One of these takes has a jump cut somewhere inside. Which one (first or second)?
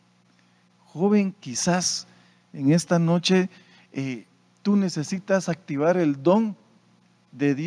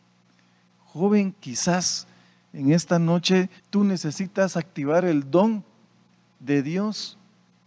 second